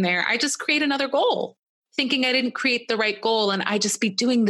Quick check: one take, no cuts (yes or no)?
yes